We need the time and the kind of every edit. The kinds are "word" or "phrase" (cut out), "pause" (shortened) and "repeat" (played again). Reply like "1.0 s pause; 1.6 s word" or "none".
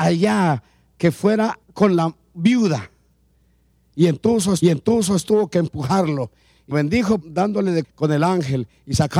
1.6 s pause; 4.6 s repeat; 6.7 s word; 7.2 s phrase; 7.8 s word